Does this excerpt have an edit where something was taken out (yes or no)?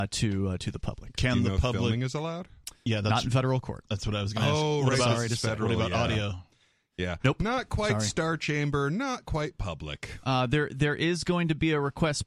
no